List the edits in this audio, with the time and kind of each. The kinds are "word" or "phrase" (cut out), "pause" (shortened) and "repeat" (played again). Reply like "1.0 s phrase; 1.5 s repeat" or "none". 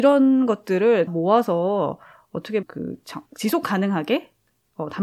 1.1 s word; 2.6 s word; 3.3 s pause